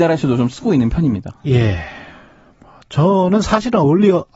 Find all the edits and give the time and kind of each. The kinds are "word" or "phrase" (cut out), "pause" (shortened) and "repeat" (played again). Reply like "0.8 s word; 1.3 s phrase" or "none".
none

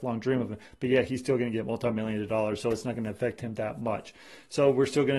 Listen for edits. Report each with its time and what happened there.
none

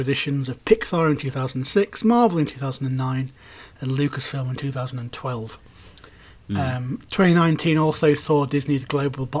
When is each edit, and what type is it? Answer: none

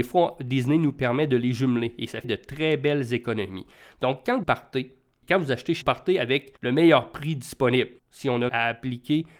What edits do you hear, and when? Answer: 2.2 s word; 4.4 s word; 5.8 s phrase; 6.6 s pause; 8.0 s pause; 8.5 s word

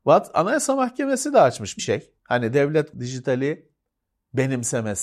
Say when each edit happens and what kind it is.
1.8 s phrase; 2.2 s pause; 2.9 s word

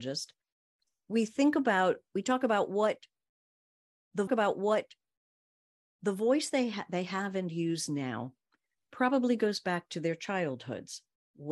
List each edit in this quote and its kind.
4.3 s repeat

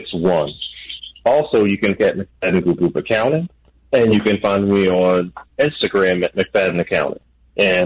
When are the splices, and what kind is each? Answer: 2.0 s phrase; 2.8 s repeat

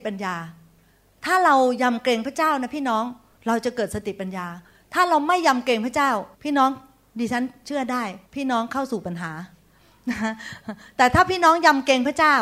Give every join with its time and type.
6.3 s pause; 8.3 s pause

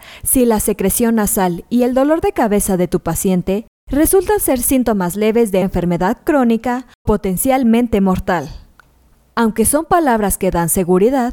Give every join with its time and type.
5.6 s word; 7.1 s word; 9.1 s pause

